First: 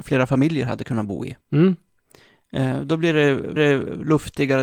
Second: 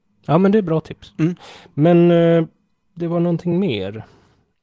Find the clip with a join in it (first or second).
first